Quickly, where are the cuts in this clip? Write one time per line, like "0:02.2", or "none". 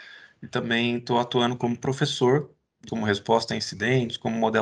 0:02.9